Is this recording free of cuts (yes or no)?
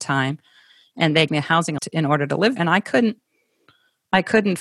no